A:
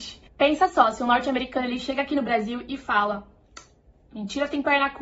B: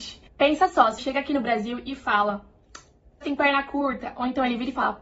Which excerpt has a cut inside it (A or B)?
B